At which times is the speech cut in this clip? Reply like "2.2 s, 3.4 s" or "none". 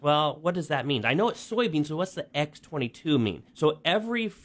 3.5 s